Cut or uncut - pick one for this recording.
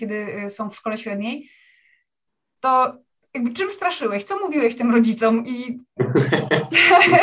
uncut